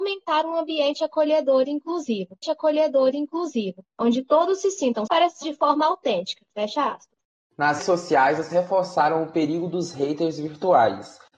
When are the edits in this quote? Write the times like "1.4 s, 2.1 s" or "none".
2.4 s, 5.1 s, 5.4 s, 7.8 s, 8.5 s